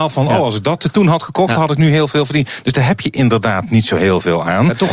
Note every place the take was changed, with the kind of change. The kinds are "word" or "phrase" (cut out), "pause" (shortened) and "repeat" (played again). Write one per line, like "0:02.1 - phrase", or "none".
none